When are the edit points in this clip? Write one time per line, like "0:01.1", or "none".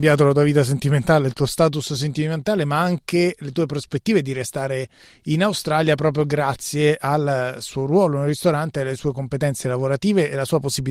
none